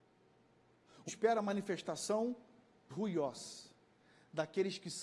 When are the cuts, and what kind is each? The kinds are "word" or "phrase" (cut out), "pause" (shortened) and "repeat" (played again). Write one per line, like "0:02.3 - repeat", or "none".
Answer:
0:01.1 - word
0:02.9 - word